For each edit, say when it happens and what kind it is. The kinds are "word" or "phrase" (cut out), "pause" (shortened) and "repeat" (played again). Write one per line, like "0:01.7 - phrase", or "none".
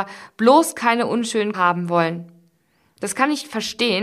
0:01.5 - word